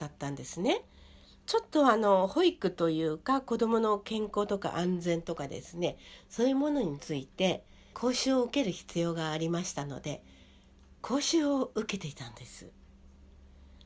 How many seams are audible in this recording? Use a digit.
1